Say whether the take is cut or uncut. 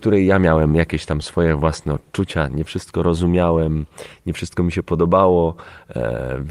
uncut